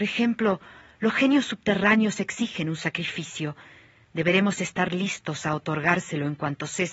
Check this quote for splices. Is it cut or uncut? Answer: uncut